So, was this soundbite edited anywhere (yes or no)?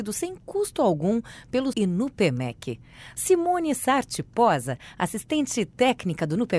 yes